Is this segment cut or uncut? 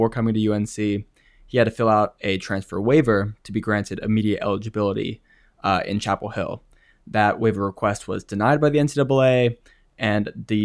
uncut